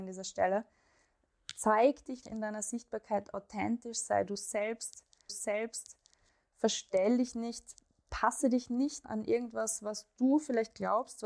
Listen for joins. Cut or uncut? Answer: cut